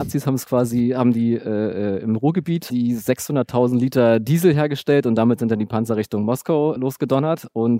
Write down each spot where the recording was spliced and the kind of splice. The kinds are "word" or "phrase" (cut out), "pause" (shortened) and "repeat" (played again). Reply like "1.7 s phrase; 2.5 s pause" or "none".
2.7 s word; 6.8 s word